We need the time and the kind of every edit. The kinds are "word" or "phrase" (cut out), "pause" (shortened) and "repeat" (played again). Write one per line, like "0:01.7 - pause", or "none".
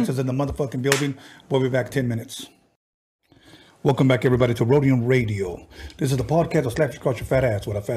none